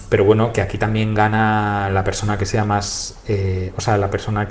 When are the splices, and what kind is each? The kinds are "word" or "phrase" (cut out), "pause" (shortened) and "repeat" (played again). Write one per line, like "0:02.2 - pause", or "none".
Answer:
none